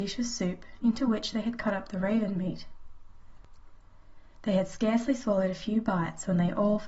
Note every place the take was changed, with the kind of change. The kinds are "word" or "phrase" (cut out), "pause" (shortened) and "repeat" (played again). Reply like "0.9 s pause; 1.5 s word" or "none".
none